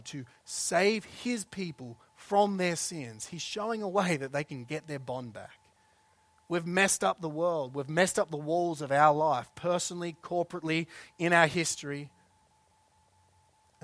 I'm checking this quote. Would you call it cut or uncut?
uncut